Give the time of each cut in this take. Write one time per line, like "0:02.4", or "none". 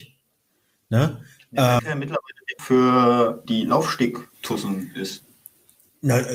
0:01.8
0:02.6
0:03.5
0:04.3